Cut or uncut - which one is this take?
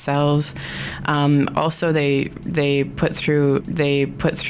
cut